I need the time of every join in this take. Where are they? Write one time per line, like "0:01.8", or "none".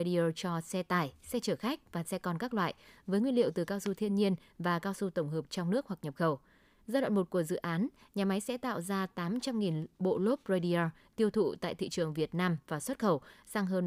none